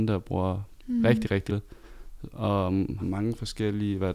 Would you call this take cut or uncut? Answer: cut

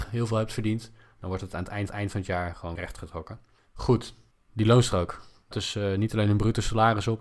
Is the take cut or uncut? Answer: cut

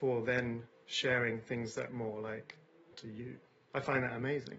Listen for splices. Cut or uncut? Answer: cut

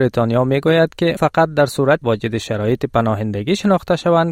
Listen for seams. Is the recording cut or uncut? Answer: cut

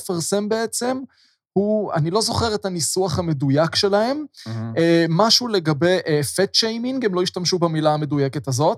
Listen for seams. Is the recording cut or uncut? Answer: uncut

